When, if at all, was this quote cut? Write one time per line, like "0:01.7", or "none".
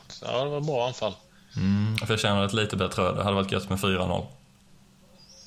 none